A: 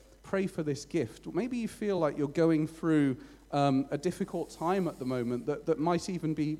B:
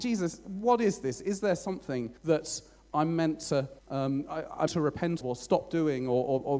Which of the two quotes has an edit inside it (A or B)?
B